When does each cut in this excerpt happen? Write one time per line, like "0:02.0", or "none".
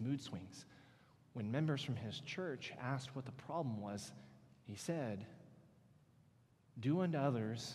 none